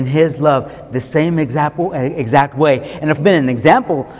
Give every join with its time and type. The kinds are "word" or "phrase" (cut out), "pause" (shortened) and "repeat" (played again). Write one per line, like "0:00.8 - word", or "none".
0:03.2 - phrase